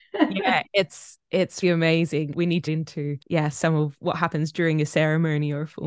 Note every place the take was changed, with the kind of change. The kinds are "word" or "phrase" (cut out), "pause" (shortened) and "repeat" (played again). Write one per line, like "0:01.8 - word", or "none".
0:01.6 - word
0:02.3 - word
0:02.7 - word
0:03.2 - pause

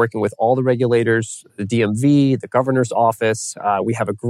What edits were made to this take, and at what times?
none

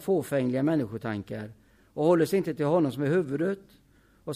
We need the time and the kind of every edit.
none

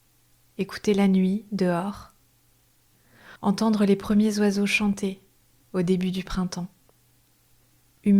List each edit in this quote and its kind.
0:03.4 - pause

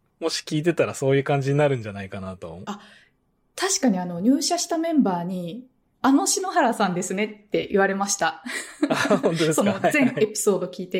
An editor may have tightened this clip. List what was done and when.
none

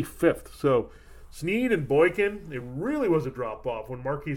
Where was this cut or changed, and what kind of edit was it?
none

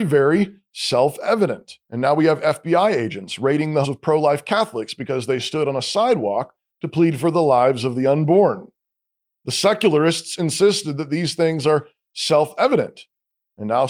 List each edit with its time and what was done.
0:01.8 - pause
0:03.8 - word

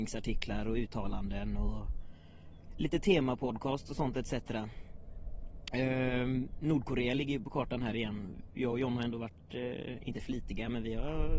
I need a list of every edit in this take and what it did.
none

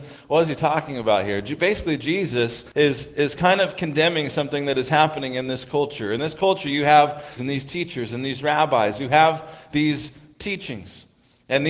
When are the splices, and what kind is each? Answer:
0:02.7 - pause
0:07.4 - phrase

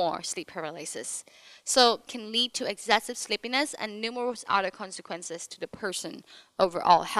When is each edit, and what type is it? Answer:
0:02.1 - phrase

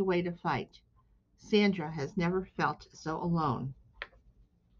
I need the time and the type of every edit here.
none

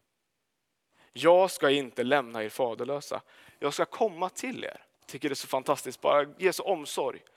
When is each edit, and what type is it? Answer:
0:04.9 - pause

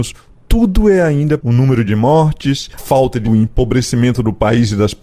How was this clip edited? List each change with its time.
0:01.4 - word
0:01.9 - word
0:02.8 - word
0:03.2 - phrase

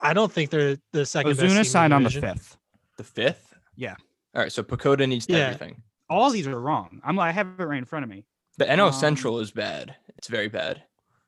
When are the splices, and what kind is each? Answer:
0:05.3 - phrase

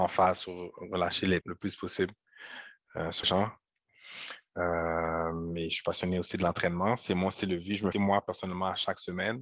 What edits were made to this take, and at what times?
0:01.4 - word
0:03.2 - word
0:07.9 - phrase

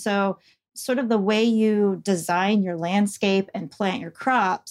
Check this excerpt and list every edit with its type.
none

